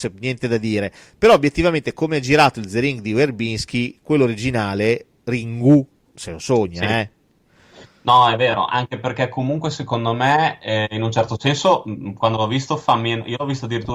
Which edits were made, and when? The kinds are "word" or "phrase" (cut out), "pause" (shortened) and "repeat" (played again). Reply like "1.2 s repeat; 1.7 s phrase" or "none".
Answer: none